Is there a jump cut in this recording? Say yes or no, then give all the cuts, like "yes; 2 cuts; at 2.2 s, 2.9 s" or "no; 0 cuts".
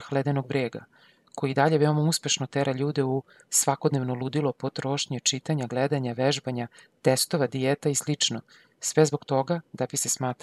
no; 0 cuts